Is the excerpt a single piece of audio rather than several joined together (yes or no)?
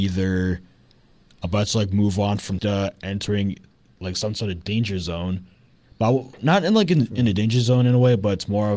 no